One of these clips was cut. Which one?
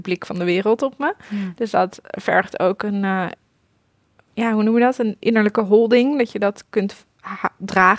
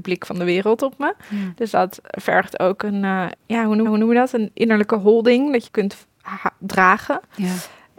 second; 3 cuts; at 3.4 s, 3.9 s, 5.7 s

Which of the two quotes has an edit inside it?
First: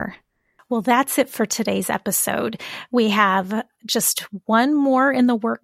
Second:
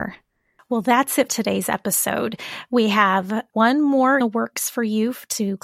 second; 3 cuts; at 1.3 s, 3.5 s, 4.2 s

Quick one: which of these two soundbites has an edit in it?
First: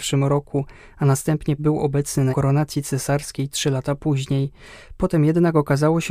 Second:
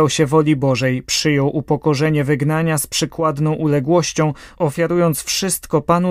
first; 2 cuts; at 1.6 s, 2.3 s

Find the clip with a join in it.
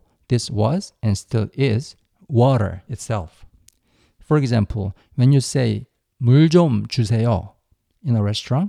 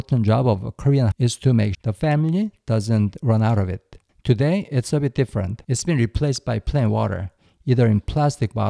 second; 4 cuts; at 1.1 s, 1.7 s, 4.1 s, 5.6 s

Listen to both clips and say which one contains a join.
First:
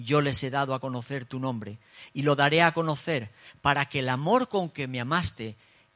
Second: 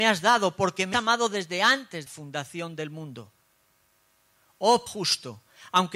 second; 3 cuts; at 0.9 s, 2.1 s, 4.9 s

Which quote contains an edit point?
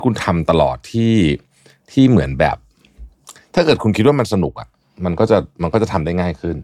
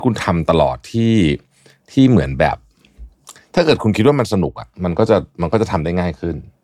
second; 1 cut; at 4.7 s

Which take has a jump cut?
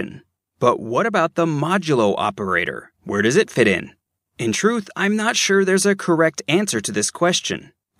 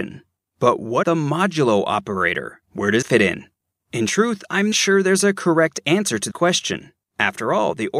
second; 4 cuts; at 1.0 s, 3.0 s, 4.7 s, 6.3 s

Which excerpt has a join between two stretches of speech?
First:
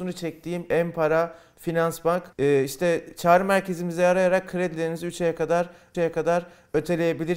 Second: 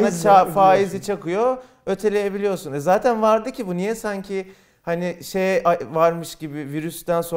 first; 2 cuts; at 2.3 s, 5.9 s

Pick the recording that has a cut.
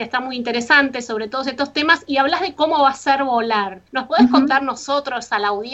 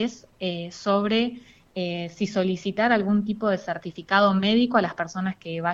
first; 1 cut; at 3.9 s

